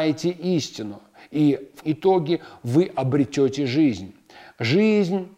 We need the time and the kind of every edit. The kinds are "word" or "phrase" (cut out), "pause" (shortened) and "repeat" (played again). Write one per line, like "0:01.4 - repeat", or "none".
0:01.8 - word